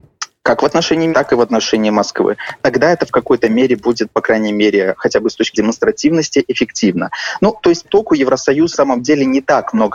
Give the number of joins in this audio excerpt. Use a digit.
4